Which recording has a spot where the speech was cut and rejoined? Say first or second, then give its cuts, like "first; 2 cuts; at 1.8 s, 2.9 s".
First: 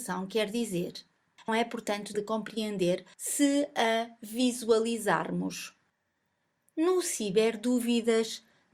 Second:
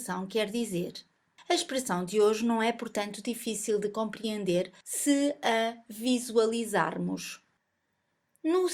first; 2 cuts; at 1.5 s, 2.1 s